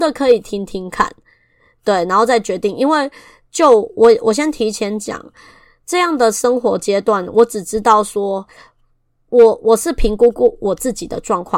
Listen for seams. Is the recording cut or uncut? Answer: uncut